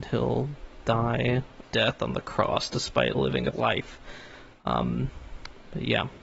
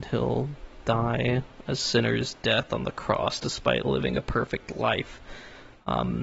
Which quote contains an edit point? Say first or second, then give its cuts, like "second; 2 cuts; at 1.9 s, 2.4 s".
first; 2 cuts; at 1.6 s, 3.5 s